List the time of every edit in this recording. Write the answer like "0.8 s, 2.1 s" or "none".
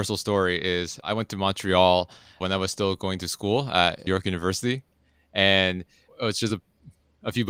none